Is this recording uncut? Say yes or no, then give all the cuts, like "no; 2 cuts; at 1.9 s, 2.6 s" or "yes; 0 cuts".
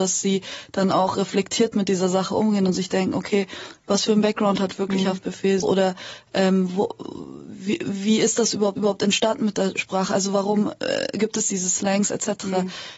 no; 2 cuts; at 5.6 s, 8.8 s